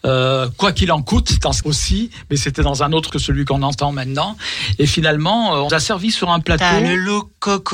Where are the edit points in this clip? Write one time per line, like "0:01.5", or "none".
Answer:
0:01.6
0:03.1
0:05.7

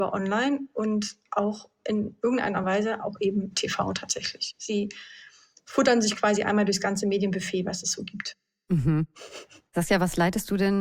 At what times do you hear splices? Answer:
none

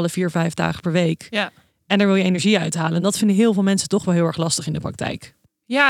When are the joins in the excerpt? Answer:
none

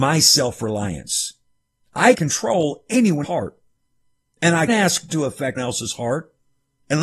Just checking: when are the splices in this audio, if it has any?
0:02.1
0:03.2
0:04.7
0:05.1
0:05.6

